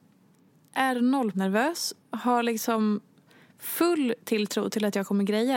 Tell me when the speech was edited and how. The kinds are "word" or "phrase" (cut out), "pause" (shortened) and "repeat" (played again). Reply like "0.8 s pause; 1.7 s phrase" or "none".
1.3 s word; 2.0 s pause